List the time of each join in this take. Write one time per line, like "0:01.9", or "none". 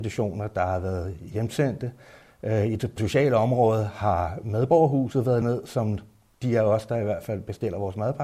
0:03.0
0:05.4